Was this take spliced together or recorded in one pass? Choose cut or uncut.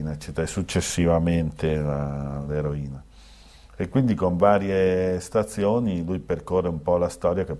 uncut